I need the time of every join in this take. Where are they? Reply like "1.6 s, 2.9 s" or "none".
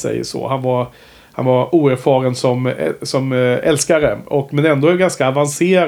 none